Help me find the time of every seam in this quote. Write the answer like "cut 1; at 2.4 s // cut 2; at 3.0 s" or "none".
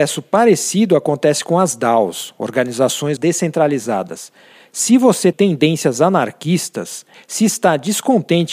cut 1; at 3.2 s // cut 2; at 5.3 s